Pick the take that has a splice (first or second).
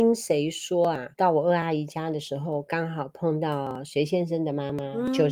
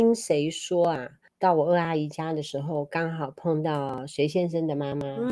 first